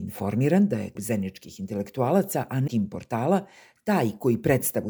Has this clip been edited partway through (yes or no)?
yes